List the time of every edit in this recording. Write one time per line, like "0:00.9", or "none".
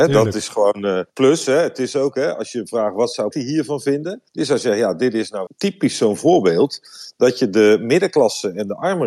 0:01.1
0:03.3
0:04.3
0:05.5

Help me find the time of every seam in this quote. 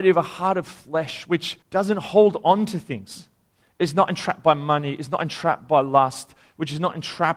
0:01.6
0:03.5

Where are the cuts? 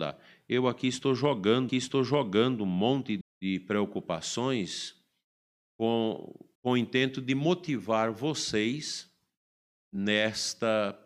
0:01.7
0:03.2
0:06.6

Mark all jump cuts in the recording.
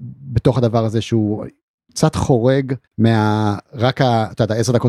0:02.9

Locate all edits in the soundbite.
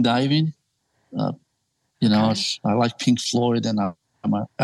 none

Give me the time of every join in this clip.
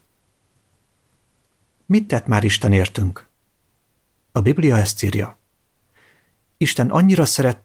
none

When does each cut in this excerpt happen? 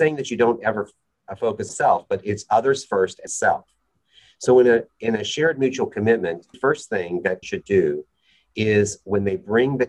0:01.7
0:03.3
0:06.5
0:07.4

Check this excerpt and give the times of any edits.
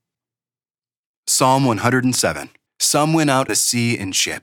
0:02.7
0:03.5

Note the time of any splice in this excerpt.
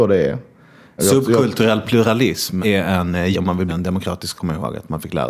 0:03.3
0:03.7
0:04.3

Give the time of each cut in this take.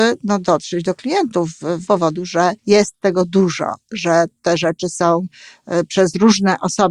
0:01.9
0:02.6
0:04.4

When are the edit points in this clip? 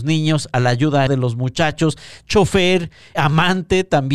0:01.1
0:03.1

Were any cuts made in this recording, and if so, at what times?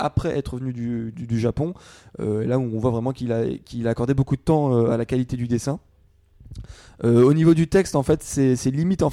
none

